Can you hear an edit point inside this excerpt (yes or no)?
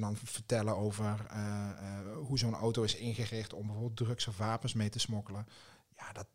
no